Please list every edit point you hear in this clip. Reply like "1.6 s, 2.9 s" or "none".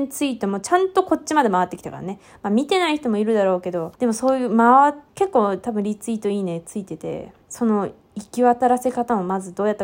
4.0 s, 5.1 s, 7.4 s